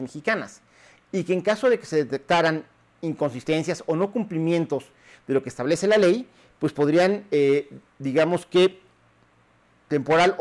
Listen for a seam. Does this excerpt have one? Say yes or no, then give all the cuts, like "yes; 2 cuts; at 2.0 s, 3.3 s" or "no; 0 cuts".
no; 0 cuts